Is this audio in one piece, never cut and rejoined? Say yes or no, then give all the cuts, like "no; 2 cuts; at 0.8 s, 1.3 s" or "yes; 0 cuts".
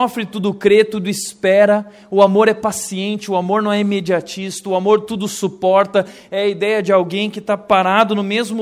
yes; 0 cuts